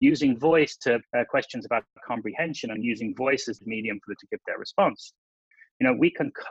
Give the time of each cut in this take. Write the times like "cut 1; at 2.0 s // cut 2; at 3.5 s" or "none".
cut 1; at 1.0 s // cut 2; at 2.8 s // cut 3; at 3.6 s // cut 4; at 4.2 s

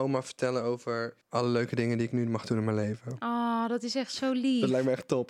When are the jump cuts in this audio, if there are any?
cut 1; at 1.2 s

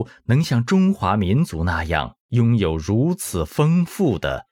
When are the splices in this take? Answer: cut 1; at 2.2 s

